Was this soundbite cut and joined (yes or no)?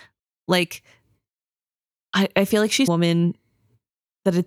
yes